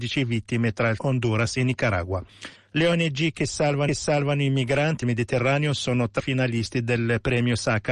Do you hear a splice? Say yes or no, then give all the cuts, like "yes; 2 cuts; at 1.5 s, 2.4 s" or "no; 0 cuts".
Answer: yes; 5 cuts; at 1.0 s, 2.6 s, 3.9 s, 5.0 s, 6.2 s